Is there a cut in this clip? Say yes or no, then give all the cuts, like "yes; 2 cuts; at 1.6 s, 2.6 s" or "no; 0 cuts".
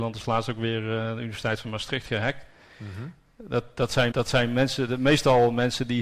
yes; 1 cut; at 4.1 s